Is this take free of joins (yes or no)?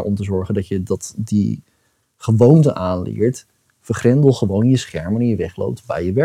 yes